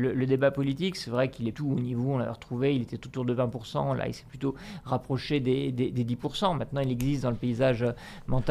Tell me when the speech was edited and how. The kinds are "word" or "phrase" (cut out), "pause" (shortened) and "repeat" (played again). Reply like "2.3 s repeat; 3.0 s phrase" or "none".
1.5 s phrase